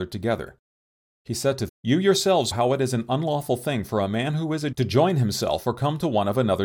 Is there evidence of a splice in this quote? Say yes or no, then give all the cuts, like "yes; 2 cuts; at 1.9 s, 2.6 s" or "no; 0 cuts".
yes; 3 cuts; at 1.7 s, 2.5 s, 4.7 s